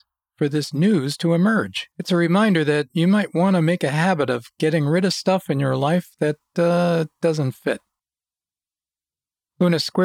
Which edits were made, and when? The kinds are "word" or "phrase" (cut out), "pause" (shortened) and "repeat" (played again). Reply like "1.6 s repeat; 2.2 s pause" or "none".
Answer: 1.9 s pause